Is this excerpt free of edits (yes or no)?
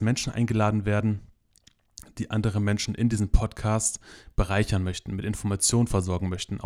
yes